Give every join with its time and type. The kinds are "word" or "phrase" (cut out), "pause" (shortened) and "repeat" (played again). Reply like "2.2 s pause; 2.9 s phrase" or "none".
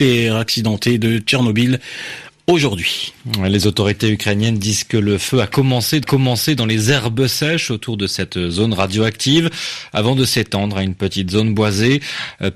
6.0 s repeat